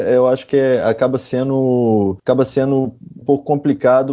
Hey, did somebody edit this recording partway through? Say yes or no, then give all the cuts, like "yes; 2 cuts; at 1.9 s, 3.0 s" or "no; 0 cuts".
yes; 2 cuts; at 2.2 s, 3.2 s